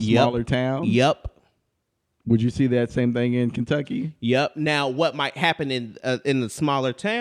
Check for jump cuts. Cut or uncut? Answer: uncut